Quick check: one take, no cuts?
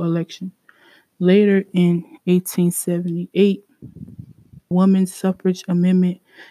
no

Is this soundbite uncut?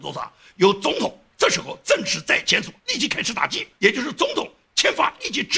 no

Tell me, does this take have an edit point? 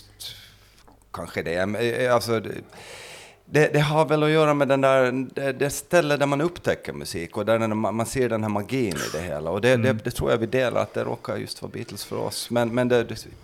no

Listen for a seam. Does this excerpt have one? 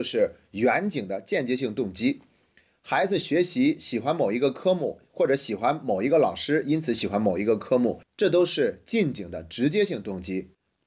no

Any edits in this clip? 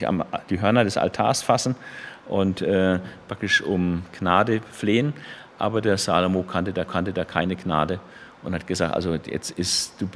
yes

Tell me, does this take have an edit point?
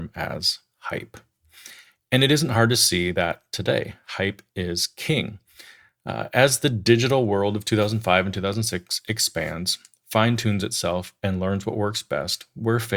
no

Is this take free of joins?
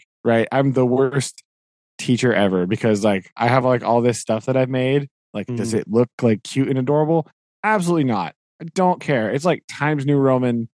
yes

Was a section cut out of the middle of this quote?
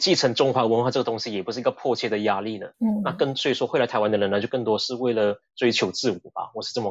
no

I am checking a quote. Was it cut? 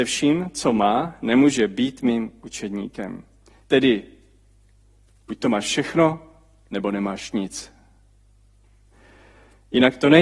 no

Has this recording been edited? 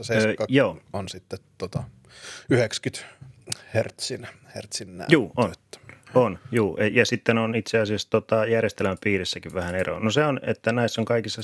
no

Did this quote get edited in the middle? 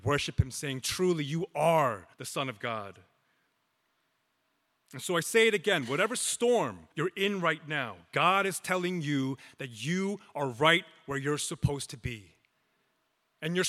yes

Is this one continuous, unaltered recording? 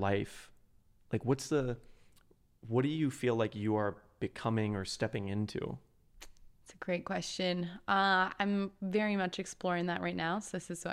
no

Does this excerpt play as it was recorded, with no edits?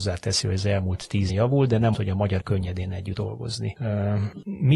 no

